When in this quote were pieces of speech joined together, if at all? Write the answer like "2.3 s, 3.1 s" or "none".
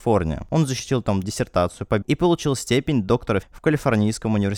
1.2 s, 2.0 s, 3.4 s